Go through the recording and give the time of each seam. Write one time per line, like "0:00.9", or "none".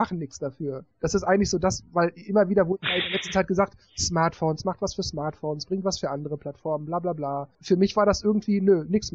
0:00.9